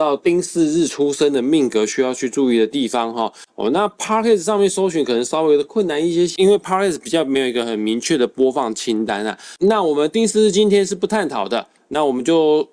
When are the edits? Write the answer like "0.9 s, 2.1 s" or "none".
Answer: none